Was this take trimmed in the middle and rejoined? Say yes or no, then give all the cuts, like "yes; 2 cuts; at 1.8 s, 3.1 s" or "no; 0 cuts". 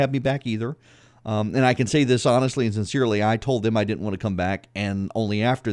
no; 0 cuts